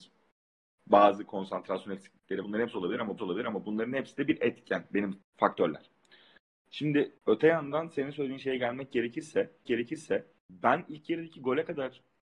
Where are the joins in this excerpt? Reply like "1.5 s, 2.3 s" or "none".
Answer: 2.4 s, 3.2 s, 5.2 s, 7.2 s, 9.6 s